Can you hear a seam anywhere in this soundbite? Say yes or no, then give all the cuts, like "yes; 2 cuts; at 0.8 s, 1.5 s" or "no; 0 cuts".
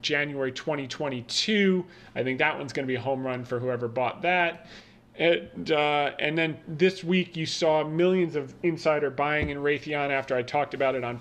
no; 0 cuts